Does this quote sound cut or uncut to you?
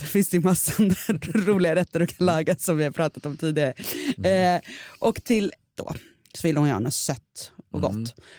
cut